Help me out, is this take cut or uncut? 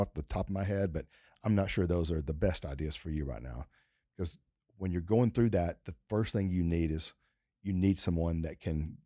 uncut